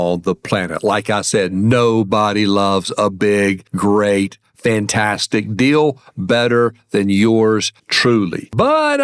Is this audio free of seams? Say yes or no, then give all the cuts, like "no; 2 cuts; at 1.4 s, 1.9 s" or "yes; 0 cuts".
no; 1 cut; at 7.8 s